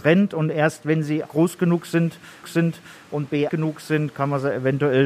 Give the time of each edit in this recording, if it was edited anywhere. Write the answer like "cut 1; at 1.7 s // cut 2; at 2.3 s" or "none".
cut 1; at 1.2 s // cut 2; at 2.4 s // cut 3; at 3.5 s